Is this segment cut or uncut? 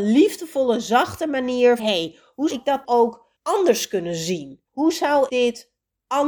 cut